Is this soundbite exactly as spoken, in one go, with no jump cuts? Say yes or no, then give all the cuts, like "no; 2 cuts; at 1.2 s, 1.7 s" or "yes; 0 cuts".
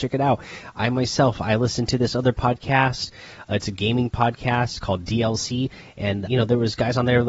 no; 1 cut; at 6.3 s